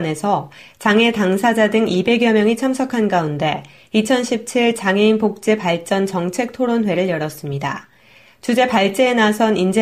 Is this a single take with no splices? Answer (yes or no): yes